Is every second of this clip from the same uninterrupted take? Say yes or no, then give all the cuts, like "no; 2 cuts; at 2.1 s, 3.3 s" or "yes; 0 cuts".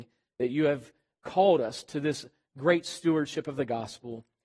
yes; 0 cuts